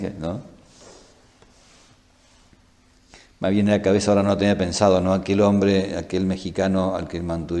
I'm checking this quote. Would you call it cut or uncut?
uncut